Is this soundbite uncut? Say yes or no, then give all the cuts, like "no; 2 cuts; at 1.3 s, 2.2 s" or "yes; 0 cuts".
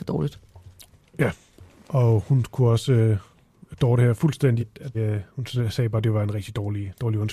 no; 2 cuts; at 4.6 s, 4.9 s